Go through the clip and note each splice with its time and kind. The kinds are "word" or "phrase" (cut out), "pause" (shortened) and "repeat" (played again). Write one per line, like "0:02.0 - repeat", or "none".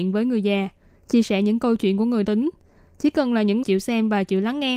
0:02.2 - word
0:03.6 - word

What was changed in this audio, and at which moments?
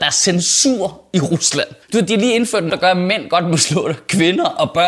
0:01.8 - pause
0:02.7 - word

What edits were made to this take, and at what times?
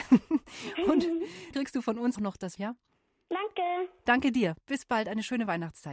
0:01.5 - word
0:02.2 - word
0:02.6 - word
0:04.6 - pause

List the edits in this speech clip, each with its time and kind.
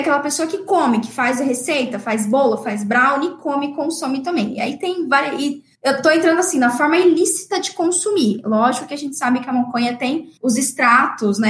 0:05.7 - pause
0:10.4 - pause

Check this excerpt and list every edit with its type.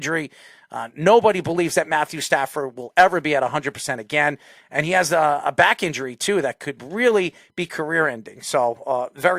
none

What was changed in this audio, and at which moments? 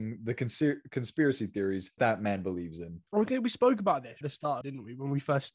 0:02.0 - word
0:03.1 - pause
0:04.2 - phrase
0:04.6 - phrase

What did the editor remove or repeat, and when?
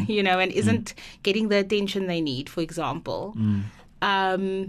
none

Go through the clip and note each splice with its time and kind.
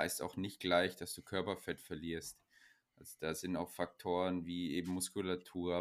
none

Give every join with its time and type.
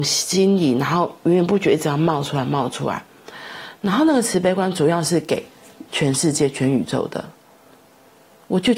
0:05.9 - pause

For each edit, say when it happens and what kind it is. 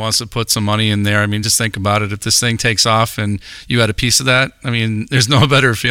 none

